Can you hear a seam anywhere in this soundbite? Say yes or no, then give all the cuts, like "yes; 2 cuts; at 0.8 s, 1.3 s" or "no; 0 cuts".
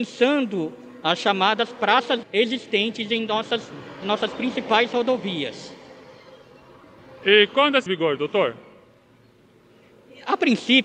yes; 3 cuts; at 2.2 s, 4.0 s, 7.9 s